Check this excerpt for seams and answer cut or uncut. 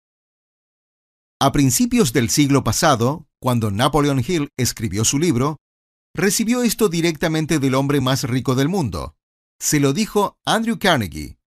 uncut